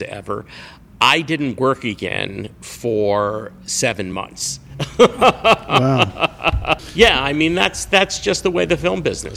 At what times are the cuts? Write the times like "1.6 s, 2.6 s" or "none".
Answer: none